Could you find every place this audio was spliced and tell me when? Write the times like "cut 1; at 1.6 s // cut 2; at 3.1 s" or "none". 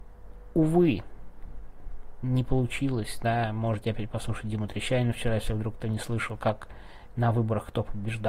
none